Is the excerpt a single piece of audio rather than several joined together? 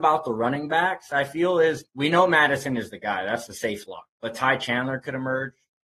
no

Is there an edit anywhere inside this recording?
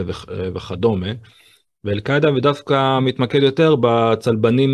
no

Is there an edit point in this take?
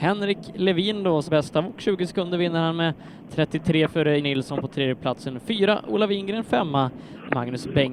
yes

